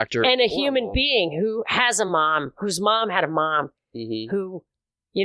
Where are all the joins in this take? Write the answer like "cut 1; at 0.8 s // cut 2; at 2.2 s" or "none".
none